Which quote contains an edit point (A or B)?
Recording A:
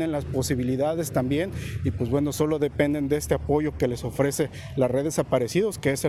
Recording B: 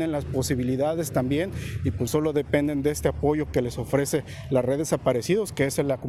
B